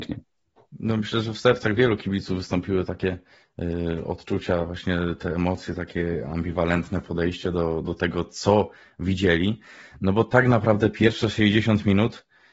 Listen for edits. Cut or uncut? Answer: uncut